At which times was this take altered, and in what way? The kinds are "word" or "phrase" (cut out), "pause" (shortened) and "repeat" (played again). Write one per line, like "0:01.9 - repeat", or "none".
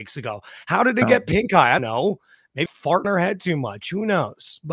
0:01.8 - word
0:02.7 - word
0:03.0 - word